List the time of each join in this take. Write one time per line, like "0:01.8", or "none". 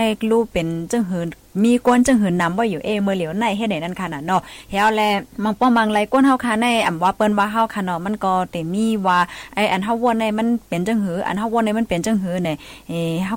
0:05.3